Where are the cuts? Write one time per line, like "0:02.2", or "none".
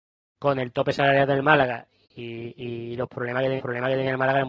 0:03.6